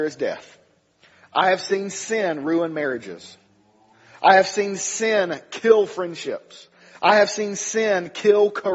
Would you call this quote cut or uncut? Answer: uncut